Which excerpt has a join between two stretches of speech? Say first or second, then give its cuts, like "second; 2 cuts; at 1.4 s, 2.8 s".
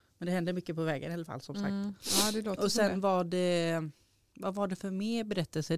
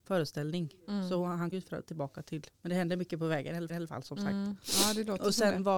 second; 3 cuts; at 1.5 s, 2.5 s, 3.7 s